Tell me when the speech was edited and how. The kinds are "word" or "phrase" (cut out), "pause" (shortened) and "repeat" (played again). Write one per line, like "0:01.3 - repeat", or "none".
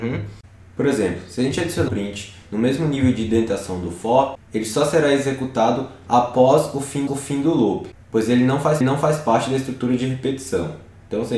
0:01.9 - word
0:04.4 - pause
0:07.1 - repeat
0:08.0 - pause
0:08.8 - repeat

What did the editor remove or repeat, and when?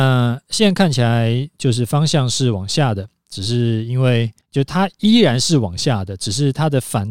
0:04.4 - pause

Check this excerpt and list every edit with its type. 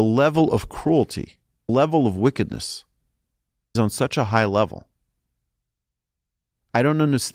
0:01.7 - word
0:03.8 - word

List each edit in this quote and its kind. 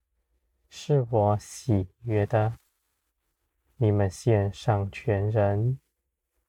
none

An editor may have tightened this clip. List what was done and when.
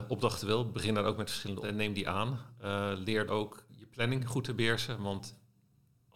0:01.6 - word
0:03.3 - word
0:03.7 - word

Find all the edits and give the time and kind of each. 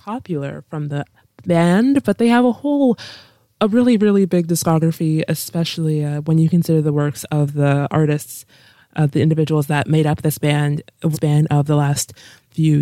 0:11.1 - word

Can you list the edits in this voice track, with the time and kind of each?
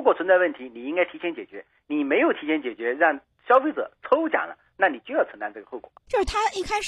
0:06.0 - pause

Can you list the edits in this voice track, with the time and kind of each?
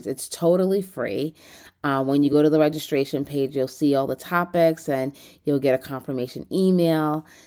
none

